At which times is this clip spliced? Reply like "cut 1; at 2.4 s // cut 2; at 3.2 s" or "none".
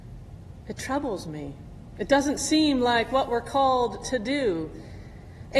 none